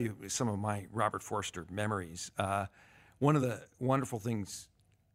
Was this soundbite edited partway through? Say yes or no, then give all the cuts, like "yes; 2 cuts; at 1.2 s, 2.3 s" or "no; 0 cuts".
no; 0 cuts